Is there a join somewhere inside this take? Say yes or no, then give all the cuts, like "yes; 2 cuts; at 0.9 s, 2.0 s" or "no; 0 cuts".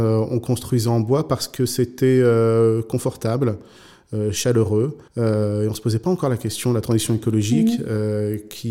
yes; 1 cut; at 5.1 s